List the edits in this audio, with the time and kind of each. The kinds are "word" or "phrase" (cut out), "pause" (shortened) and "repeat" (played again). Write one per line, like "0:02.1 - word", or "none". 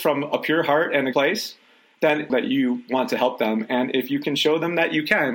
0:01.1 - word
0:02.3 - phrase